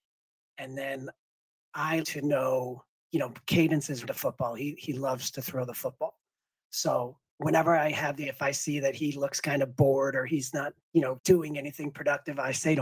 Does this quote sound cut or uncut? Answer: cut